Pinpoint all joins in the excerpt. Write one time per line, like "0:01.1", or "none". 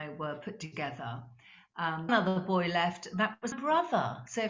0:02.1
0:03.5